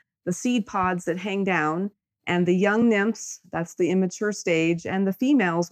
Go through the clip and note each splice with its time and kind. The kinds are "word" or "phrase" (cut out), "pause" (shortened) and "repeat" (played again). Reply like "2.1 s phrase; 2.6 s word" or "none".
none